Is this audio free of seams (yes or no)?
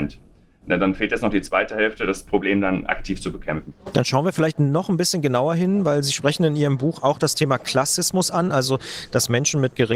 yes